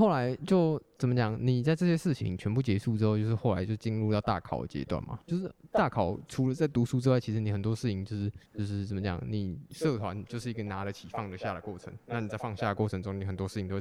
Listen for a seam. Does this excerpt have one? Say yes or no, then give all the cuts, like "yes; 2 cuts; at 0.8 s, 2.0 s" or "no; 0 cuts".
yes; 2 cuts; at 5.2 s, 8.5 s